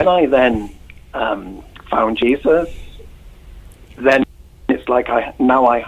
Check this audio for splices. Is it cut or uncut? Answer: uncut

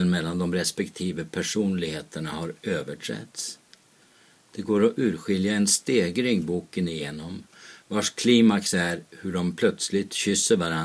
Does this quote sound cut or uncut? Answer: uncut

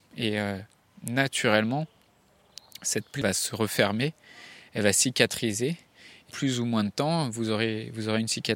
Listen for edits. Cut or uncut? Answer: cut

